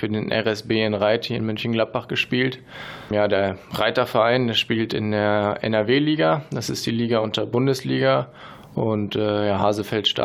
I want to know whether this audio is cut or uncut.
uncut